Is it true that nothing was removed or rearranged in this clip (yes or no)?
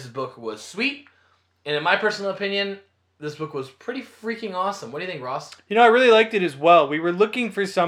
yes